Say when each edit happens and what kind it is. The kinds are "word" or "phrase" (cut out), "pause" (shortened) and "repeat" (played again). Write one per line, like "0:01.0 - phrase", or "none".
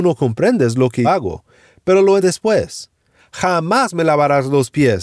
0:01.0 - word
0:02.2 - word